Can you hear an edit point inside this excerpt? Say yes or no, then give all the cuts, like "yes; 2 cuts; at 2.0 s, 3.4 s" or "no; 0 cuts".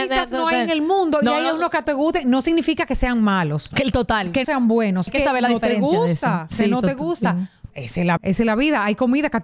yes; 5 cuts; at 1.9 s, 4.4 s, 5.1 s, 7.7 s, 8.2 s